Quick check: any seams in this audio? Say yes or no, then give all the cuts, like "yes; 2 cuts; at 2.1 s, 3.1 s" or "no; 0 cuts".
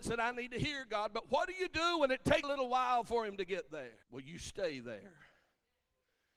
yes; 2 cuts; at 2.4 s, 4.0 s